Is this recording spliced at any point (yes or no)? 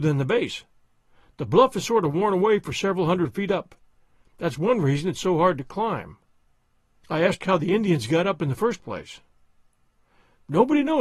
no